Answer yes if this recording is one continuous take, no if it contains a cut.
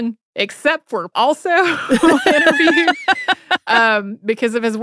no